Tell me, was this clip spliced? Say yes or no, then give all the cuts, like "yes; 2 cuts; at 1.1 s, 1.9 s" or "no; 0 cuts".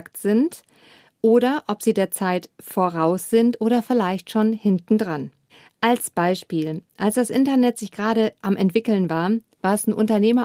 yes; 1 cut; at 5.5 s